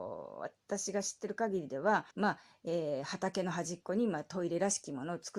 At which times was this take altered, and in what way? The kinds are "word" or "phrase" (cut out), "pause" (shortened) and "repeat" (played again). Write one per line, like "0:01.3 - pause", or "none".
0:02.1 - pause